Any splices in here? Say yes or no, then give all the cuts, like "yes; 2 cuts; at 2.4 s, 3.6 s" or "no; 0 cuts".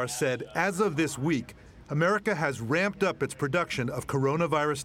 no; 0 cuts